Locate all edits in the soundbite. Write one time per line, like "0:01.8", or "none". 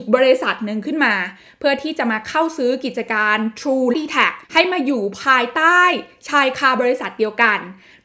0:03.9
0:04.4